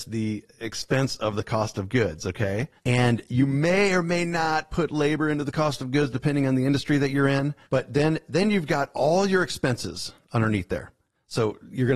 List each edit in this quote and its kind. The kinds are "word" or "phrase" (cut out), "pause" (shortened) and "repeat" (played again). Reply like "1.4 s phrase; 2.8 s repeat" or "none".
2.8 s pause; 7.6 s pause